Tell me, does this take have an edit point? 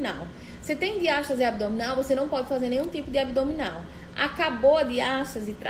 no; 0 cuts

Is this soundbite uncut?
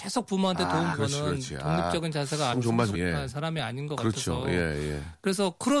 no; 3 cuts; at 0.9 s, 2.5 s, 2.9 s

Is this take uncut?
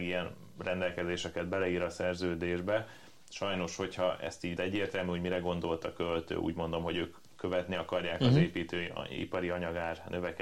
no; 1 cut; at 4.6 s

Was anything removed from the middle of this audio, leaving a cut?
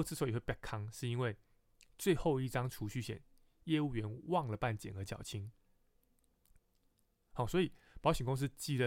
no; 0 cuts

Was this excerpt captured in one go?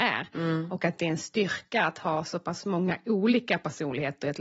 yes; 0 cuts

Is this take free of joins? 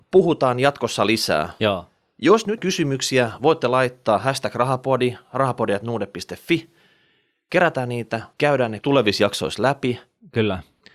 no; 3 cuts; at 2.6 s, 8.3 s, 8.8 s

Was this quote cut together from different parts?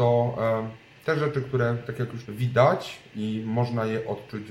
yes; 1 cut; at 2.2 s

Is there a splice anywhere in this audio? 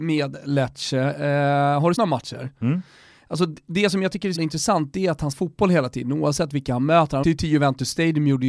yes; 4 cuts; at 2.0 s, 4.4 s, 5.3 s, 7.2 s

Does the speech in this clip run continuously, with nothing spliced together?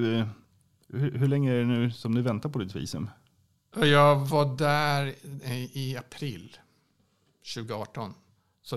yes; 0 cuts

